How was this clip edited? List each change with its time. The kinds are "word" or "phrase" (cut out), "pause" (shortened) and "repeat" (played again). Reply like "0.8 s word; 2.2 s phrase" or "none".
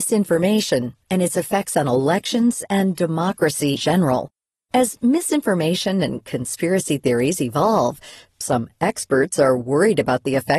3.8 s word